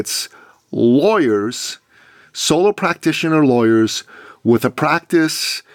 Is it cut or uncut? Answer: uncut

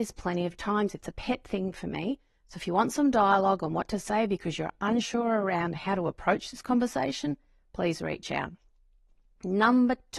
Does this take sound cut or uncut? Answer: uncut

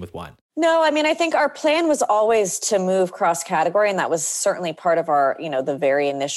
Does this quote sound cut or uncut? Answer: uncut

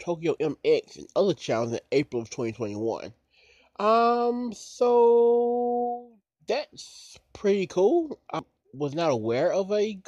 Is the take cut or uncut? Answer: uncut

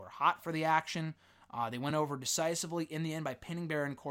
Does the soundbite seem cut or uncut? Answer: uncut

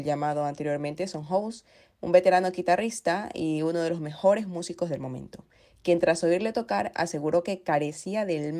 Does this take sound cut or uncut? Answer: uncut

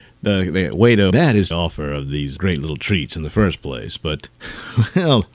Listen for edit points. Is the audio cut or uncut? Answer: cut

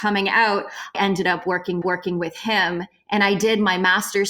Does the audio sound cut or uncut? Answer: cut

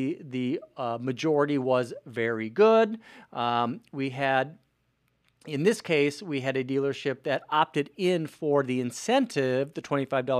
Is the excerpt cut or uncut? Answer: uncut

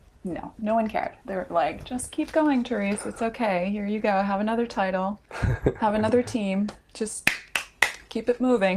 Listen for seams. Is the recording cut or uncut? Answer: cut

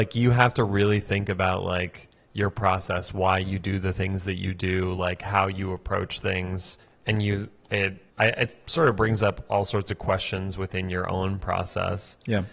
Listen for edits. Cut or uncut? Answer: cut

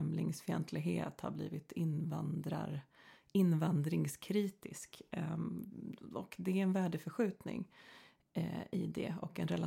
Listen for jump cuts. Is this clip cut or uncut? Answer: uncut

